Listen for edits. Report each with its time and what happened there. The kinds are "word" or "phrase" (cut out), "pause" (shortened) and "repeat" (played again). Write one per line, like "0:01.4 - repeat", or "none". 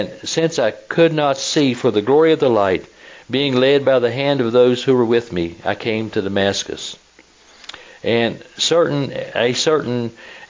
none